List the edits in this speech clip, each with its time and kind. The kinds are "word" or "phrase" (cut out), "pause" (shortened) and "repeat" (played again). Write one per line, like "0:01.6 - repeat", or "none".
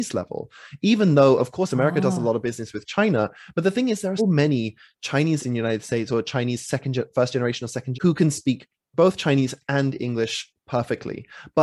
0:04.2 - word
0:05.4 - word
0:07.9 - word